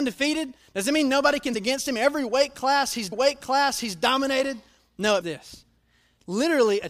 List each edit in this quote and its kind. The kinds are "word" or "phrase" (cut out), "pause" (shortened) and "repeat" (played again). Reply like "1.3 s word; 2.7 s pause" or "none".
1.5 s word; 3.1 s repeat; 5.2 s word